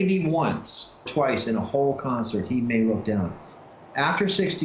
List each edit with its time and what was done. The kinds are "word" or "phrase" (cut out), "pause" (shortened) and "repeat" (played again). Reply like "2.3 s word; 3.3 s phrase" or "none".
1.1 s word

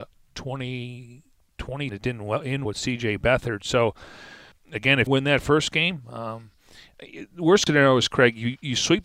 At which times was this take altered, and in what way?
1.9 s word; 2.6 s word; 4.5 s word; 5.1 s word; 7.7 s word

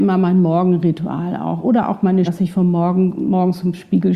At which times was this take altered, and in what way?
2.3 s word

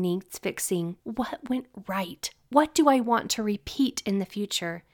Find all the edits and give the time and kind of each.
1.0 s pause

